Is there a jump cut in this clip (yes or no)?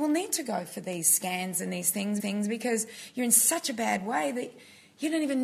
yes